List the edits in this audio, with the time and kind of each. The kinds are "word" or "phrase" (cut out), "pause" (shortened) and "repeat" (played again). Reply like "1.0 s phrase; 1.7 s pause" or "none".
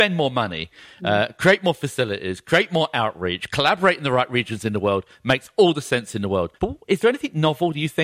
6.6 s pause